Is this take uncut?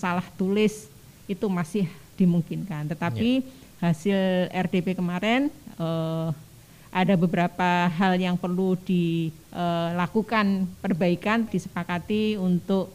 no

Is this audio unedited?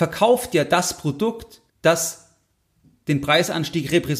no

